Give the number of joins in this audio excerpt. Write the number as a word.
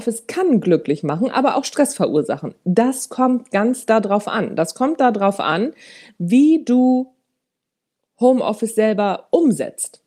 zero